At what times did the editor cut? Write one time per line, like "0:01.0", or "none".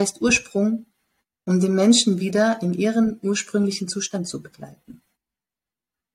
none